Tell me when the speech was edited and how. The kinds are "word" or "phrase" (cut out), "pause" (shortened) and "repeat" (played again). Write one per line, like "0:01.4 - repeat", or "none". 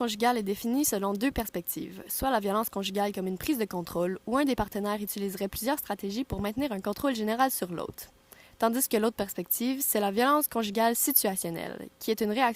none